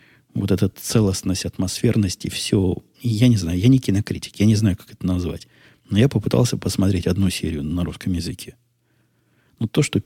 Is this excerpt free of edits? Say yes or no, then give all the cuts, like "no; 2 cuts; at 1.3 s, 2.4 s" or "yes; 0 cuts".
yes; 0 cuts